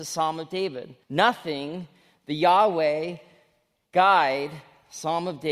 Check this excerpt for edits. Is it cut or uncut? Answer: cut